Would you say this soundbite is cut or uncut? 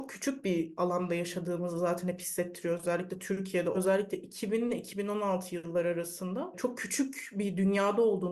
cut